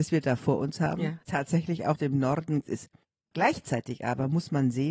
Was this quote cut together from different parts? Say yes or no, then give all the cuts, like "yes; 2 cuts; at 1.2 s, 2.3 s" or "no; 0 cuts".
yes; 4 cuts; at 1.2 s, 2.0 s, 2.6 s, 3.0 s